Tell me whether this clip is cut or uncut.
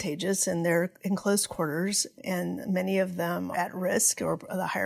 cut